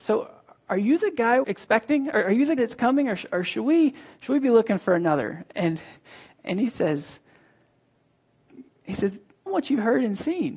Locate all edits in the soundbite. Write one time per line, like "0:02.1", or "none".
0:01.4
0:02.6
0:09.5